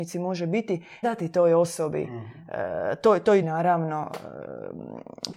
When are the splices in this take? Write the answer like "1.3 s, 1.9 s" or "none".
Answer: 1.0 s, 3.4 s